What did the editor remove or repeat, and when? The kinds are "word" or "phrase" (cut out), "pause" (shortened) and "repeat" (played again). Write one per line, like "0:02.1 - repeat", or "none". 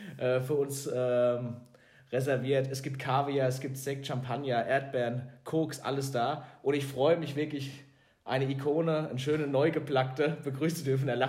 none